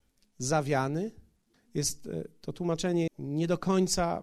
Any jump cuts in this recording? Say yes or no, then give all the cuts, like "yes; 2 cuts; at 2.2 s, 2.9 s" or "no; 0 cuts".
yes; 2 cuts; at 1.5 s, 3.1 s